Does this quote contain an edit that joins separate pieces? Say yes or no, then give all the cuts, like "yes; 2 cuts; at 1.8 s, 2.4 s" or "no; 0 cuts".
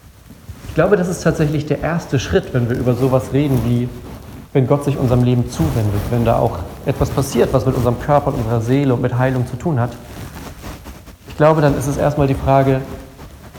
no; 0 cuts